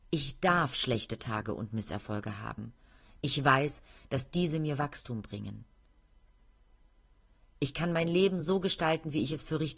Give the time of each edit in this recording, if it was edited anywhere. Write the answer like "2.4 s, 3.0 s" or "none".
none